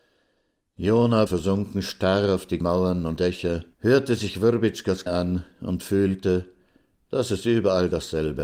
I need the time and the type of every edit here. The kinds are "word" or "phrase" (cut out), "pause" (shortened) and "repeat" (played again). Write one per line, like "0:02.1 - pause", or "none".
0:01.3 - phrase
0:02.6 - word
0:03.2 - word
0:03.7 - pause
0:05.1 - word